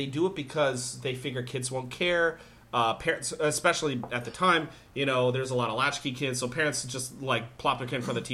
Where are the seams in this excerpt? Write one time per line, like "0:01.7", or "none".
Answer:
none